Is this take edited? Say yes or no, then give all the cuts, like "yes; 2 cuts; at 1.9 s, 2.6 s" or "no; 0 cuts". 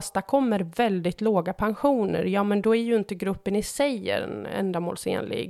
no; 0 cuts